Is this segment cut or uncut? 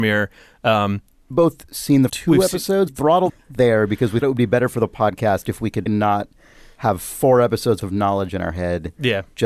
cut